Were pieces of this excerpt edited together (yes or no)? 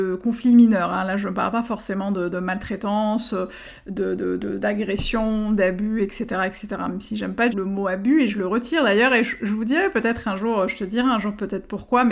yes